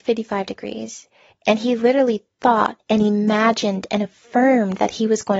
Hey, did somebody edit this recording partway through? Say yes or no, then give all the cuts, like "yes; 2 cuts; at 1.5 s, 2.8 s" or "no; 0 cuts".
no; 0 cuts